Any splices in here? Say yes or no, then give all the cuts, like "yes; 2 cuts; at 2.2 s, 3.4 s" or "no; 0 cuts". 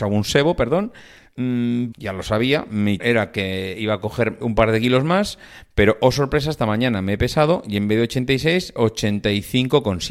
yes; 4 cuts; at 1.9 s, 3.0 s, 4.4 s, 8.8 s